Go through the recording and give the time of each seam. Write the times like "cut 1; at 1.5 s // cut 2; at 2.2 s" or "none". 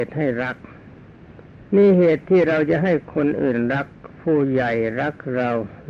cut 1; at 1.7 s